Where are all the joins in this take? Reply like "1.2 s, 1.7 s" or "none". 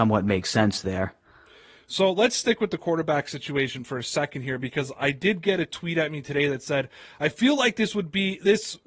none